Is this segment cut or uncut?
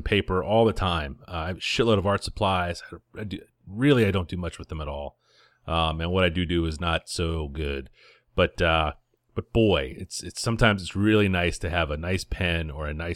uncut